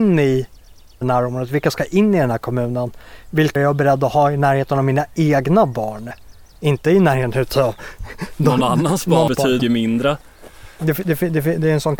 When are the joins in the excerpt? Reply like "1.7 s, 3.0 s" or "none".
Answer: 1.0 s, 3.6 s, 9.3 s, 9.6 s